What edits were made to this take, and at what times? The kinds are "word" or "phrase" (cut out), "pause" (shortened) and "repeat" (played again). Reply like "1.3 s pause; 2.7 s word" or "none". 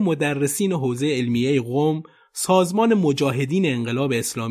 none